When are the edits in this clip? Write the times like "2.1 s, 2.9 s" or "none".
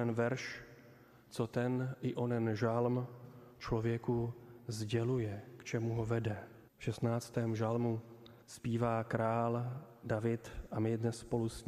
6.7 s, 8.4 s